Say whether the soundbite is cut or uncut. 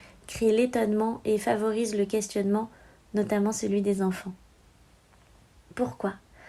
uncut